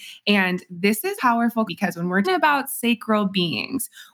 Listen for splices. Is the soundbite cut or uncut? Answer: cut